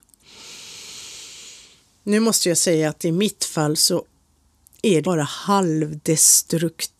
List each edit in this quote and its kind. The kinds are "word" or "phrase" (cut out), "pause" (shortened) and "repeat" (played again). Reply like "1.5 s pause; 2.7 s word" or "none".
5.0 s word